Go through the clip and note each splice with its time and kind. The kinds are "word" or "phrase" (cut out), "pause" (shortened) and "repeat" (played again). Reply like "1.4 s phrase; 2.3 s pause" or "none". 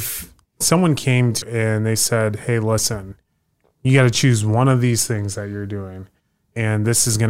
1.4 s word